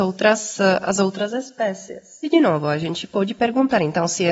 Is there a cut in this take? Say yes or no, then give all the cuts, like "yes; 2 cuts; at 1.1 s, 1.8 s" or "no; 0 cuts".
no; 0 cuts